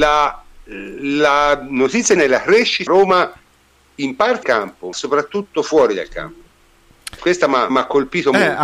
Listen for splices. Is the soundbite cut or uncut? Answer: cut